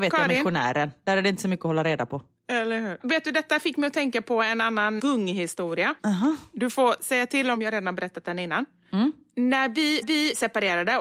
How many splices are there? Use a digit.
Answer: 4